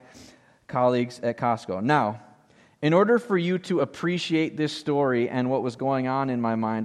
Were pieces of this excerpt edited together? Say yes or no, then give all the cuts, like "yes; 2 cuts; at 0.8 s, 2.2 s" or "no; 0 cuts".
no; 0 cuts